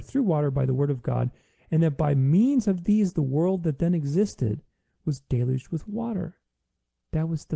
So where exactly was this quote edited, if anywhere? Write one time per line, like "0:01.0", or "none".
none